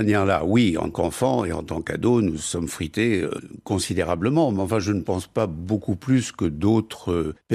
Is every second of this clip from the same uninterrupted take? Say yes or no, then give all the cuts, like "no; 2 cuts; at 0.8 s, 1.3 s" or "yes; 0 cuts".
no; 1 cut; at 0.9 s